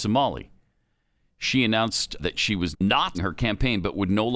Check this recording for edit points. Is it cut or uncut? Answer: cut